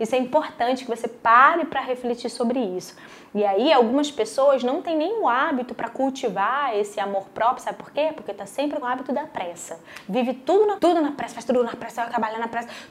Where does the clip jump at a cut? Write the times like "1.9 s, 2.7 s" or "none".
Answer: 8.8 s, 10.8 s